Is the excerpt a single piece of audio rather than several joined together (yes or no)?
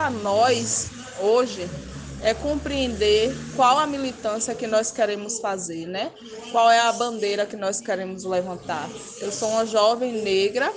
yes